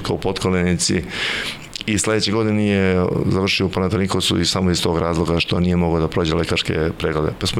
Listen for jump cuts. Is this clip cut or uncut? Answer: uncut